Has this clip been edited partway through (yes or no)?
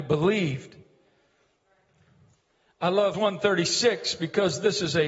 yes